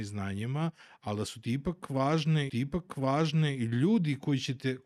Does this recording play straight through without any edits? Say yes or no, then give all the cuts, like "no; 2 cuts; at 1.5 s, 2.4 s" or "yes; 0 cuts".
no; 1 cut; at 2.5 s